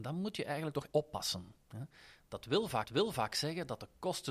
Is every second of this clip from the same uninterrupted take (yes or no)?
no